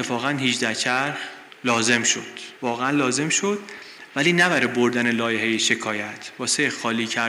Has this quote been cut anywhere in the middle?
yes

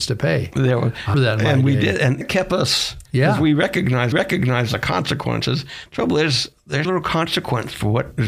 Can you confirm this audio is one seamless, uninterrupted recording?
no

